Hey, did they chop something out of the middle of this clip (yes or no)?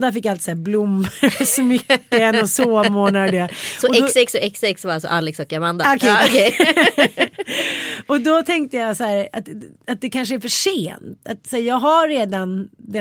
yes